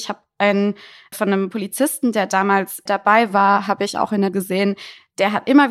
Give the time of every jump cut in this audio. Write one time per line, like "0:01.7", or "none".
0:01.1
0:02.9
0:04.3